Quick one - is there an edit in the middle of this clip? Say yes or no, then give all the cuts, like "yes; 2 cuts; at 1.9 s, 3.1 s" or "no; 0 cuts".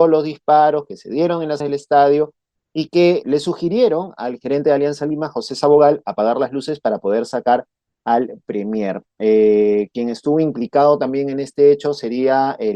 yes; 2 cuts; at 1.6 s, 3.2 s